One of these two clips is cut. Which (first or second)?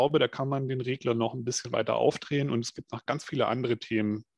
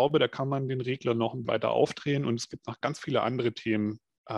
second